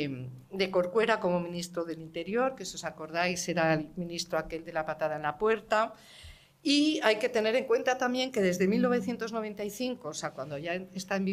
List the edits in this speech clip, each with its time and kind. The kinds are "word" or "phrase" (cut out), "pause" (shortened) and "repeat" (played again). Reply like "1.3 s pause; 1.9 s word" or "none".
none